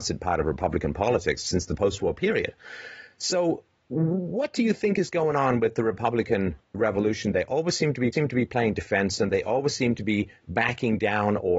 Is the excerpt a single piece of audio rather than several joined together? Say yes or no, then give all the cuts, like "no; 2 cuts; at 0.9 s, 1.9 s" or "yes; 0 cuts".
no; 1 cut; at 8.1 s